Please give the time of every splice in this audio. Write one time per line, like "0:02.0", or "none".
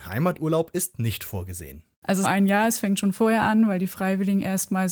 0:01.9
0:02.2

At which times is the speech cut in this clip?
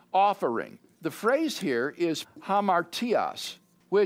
0:00.9
0:02.2

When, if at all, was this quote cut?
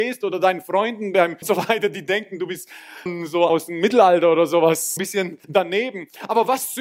0:01.4
0:03.1
0:03.5
0:05.0
0:05.4

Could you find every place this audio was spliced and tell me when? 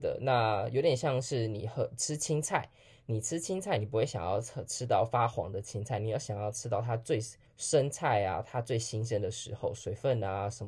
0:07.5

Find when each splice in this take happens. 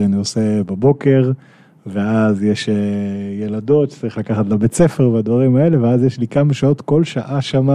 none

